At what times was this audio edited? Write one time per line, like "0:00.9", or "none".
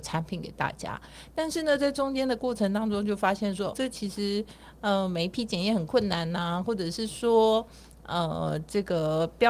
0:03.7